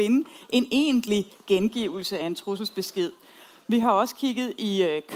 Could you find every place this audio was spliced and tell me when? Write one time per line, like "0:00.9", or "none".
none